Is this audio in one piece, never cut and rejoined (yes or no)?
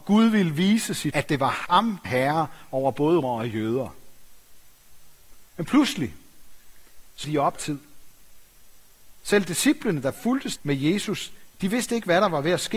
no